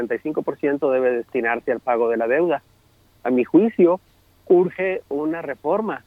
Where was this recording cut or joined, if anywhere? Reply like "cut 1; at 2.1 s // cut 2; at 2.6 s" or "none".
none